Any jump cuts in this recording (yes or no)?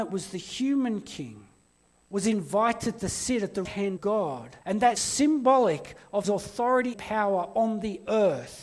yes